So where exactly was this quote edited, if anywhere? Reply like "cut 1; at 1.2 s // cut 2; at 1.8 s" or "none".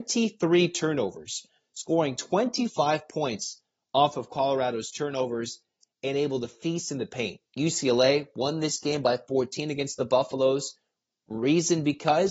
none